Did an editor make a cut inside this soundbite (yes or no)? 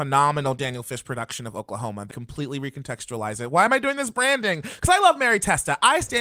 yes